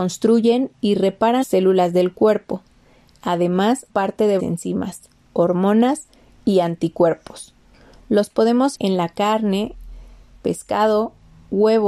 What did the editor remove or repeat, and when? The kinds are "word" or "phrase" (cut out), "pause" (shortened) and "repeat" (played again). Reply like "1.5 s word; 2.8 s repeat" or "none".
1.4 s word; 3.9 s word; 4.4 s word; 8.7 s word